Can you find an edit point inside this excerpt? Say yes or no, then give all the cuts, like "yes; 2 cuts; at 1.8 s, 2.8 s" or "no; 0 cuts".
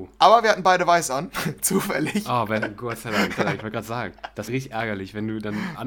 yes; 2 cuts; at 3.4 s, 4.5 s